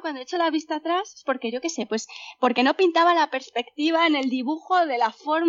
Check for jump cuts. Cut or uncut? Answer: uncut